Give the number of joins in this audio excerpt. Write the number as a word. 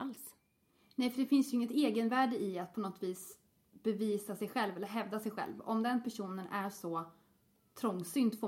zero